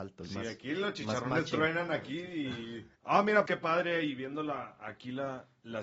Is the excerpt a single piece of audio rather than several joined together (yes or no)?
no